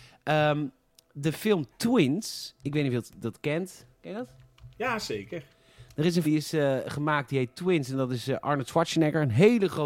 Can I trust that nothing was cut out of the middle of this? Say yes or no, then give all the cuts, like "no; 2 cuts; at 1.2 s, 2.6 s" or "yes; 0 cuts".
no; 1 cut; at 6.2 s